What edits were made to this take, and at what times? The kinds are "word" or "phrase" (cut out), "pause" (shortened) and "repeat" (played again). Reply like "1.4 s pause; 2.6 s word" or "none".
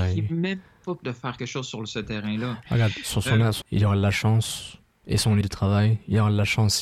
1.0 s word; 1.4 s word; 3.6 s word; 5.4 s word